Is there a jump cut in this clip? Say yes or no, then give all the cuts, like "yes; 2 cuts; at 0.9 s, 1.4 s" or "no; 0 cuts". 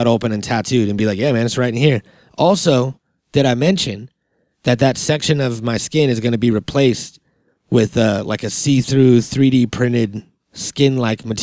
no; 0 cuts